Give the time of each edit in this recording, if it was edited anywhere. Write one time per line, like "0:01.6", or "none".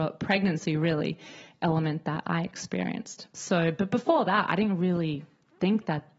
0:03.3